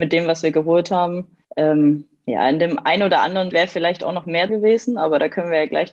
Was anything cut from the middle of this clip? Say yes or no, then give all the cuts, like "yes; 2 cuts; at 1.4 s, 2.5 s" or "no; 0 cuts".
yes; 3 cuts; at 1.4 s, 3.5 s, 4.5 s